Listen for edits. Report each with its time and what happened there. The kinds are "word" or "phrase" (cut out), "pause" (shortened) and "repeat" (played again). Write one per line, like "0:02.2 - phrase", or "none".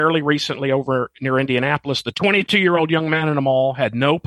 none